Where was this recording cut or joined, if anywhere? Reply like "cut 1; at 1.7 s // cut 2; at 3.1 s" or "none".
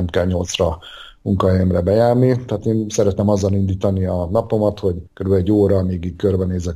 cut 1; at 5.1 s